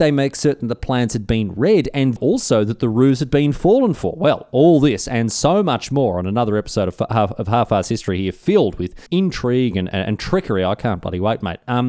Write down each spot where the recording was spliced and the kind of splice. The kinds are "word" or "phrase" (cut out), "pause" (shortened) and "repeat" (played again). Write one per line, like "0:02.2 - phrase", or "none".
0:02.2 - word
0:09.1 - pause